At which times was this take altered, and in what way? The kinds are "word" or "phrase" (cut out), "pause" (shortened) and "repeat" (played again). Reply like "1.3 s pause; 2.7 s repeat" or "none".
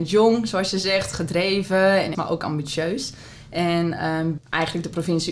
2.1 s word; 4.4 s word